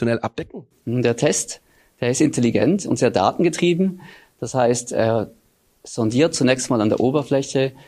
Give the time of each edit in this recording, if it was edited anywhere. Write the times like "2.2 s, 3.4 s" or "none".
none